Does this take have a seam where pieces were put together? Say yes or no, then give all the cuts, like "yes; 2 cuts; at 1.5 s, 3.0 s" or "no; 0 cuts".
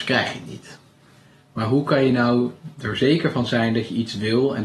no; 0 cuts